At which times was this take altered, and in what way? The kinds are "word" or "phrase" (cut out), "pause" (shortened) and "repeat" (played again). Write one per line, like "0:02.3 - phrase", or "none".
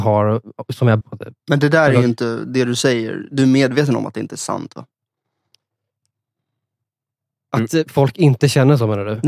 0:01.0 - word
0:01.4 - pause